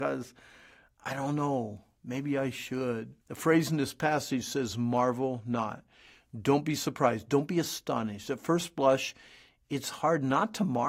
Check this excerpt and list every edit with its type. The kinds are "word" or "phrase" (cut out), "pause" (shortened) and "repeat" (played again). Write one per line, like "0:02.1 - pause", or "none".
0:03.2 - pause

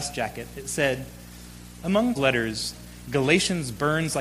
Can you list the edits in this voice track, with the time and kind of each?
0:02.2 - word

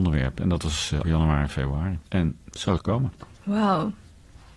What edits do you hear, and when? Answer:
0:01.0 - word
0:02.1 - pause
0:02.8 - phrase
0:03.3 - pause

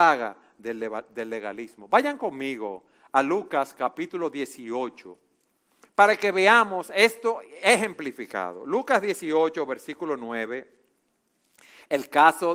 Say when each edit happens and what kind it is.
none

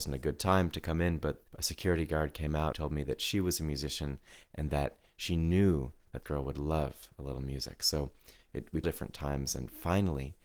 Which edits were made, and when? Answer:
0:01.5 - pause
0:02.7 - phrase
0:06.2 - word
0:08.8 - phrase

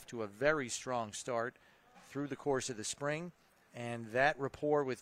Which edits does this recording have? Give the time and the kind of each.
none

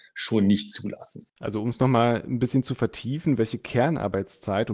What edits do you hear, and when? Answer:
0:01.3 - pause

